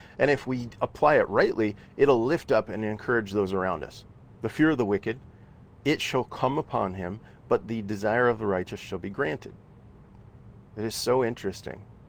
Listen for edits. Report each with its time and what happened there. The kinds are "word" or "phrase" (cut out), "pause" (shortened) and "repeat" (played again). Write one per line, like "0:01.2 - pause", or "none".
none